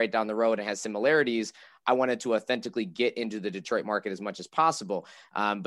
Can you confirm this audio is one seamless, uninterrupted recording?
yes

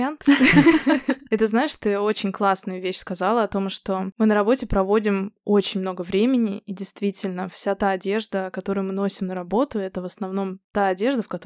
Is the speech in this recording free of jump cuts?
yes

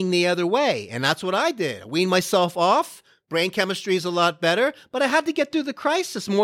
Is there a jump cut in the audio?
no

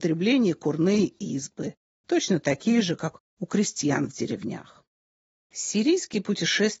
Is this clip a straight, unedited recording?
yes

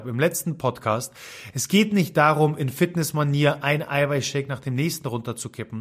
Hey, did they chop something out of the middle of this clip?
no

